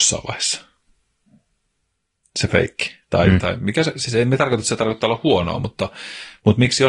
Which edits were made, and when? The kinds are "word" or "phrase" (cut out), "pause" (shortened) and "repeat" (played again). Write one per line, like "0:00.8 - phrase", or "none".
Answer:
none